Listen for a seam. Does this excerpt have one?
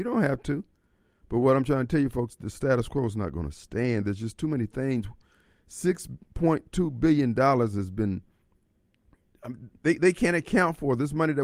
no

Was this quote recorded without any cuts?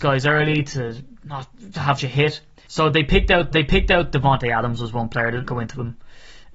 no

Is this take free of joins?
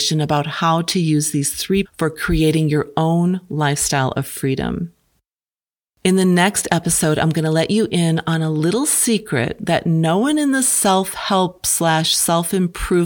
no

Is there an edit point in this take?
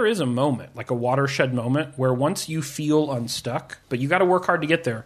yes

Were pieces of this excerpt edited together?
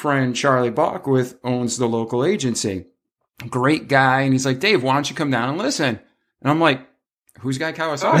no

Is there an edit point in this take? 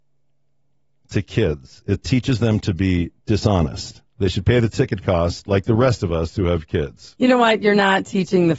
no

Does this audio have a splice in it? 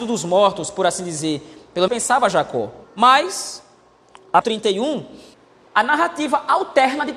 yes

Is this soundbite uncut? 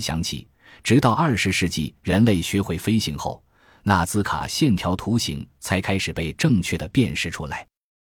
yes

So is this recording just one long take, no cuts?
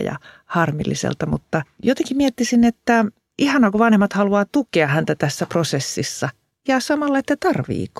yes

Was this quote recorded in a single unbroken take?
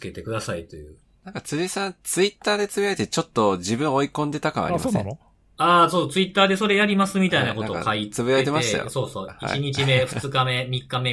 yes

